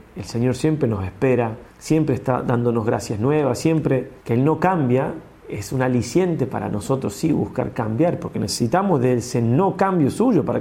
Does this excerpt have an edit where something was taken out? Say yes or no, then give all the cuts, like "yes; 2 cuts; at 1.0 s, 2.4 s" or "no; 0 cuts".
yes; 2 cuts; at 1.7 s, 4.2 s